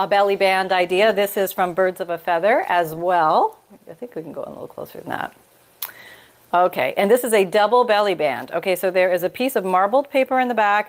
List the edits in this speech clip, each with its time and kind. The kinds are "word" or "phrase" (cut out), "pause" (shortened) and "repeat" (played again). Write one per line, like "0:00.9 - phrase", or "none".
none